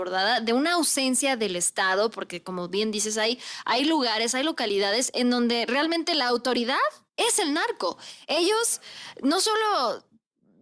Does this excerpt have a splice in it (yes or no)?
yes